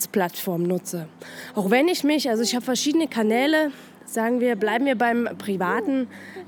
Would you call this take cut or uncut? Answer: uncut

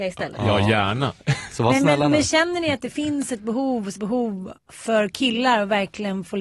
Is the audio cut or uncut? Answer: cut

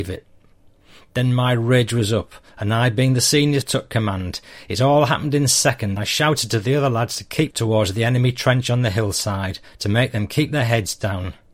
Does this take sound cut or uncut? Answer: cut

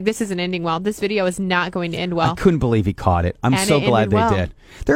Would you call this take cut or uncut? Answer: uncut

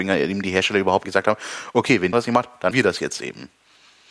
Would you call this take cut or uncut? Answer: cut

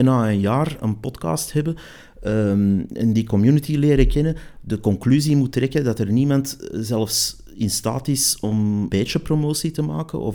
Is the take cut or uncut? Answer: cut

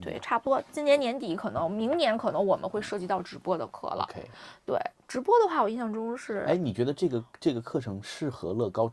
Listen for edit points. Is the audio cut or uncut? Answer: uncut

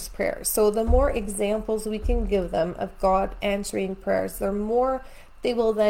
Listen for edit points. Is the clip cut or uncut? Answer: uncut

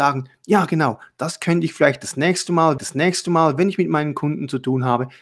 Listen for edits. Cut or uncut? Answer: cut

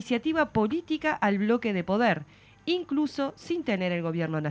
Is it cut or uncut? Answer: uncut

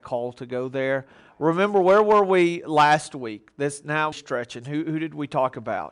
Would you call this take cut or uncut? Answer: cut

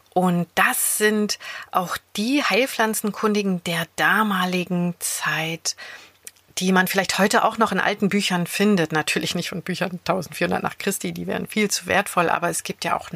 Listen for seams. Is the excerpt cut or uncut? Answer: uncut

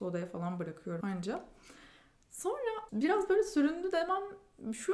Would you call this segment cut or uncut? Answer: cut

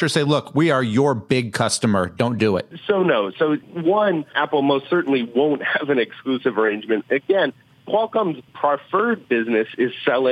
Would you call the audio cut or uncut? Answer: uncut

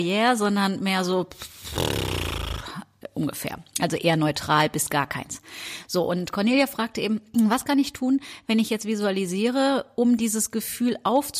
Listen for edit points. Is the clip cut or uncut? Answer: uncut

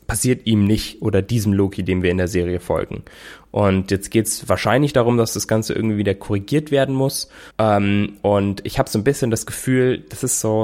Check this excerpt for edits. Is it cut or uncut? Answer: cut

